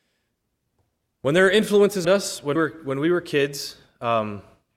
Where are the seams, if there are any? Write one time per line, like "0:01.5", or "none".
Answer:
0:02.0
0:02.6